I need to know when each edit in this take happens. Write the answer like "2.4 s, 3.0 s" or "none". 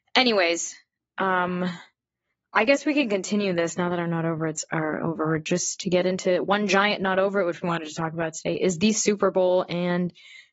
none